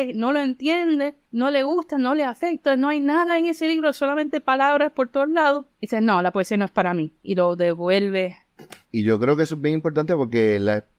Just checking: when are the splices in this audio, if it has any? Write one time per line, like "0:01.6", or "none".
0:01.2
0:05.7
0:08.8